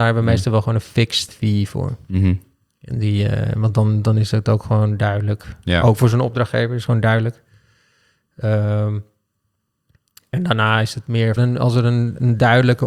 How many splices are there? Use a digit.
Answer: 2